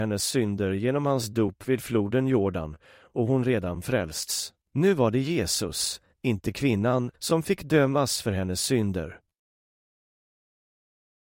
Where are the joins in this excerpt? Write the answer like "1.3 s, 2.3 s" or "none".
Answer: 4.6 s, 7.1 s